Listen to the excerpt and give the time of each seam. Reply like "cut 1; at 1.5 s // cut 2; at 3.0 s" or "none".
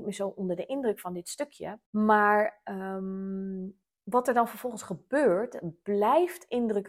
cut 1; at 1.9 s // cut 2; at 3.8 s